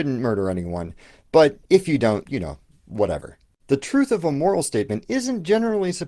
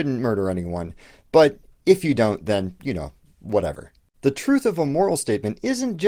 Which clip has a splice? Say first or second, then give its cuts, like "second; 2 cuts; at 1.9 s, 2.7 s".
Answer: first; 2 cuts; at 1.6 s, 2.2 s